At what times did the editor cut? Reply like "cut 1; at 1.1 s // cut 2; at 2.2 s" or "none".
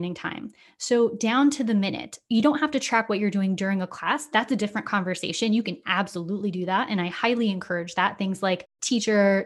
none